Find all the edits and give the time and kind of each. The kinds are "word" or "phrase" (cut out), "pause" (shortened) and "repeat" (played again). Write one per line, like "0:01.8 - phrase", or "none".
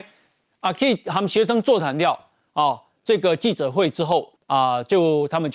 0:04.4 - pause